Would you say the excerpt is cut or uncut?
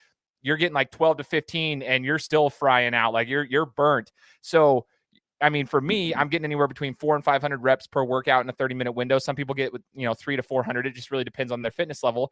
uncut